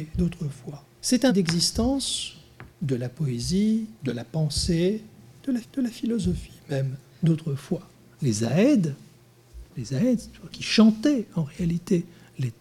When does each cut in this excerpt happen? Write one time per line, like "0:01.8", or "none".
0:00.9
0:01.3
0:02.7
0:04.0
0:05.6
0:07.9
0:09.7
0:10.5